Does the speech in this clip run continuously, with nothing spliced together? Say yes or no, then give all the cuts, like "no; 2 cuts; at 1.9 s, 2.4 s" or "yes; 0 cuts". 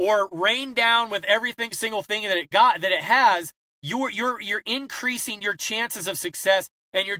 yes; 0 cuts